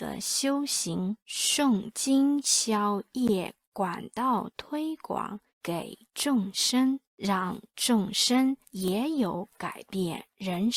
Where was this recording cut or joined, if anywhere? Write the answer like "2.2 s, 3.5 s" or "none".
1.2 s, 5.5 s, 7.1 s, 8.6 s